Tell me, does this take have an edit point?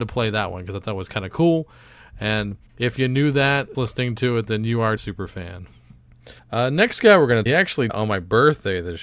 yes; 6 cuts; at 2.7 s, 3.7 s, 5.0 s, 6.4 s, 7.5 s, 7.9 s

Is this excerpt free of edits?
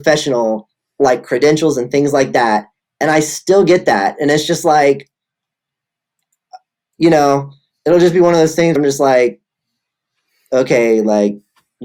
no; 1 cut; at 8.8 s

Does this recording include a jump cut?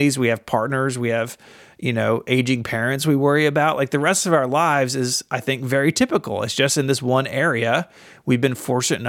no; 0 cuts

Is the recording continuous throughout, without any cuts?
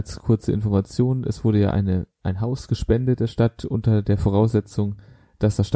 yes; 0 cuts

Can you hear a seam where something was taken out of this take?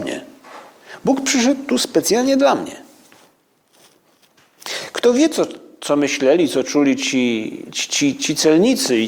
no; 0 cuts

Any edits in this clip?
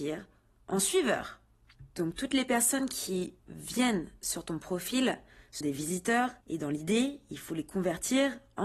yes; 3 cuts; at 3.4 s, 5.6 s, 6.4 s

